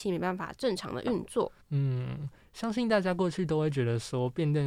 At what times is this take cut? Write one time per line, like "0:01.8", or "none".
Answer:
0:01.6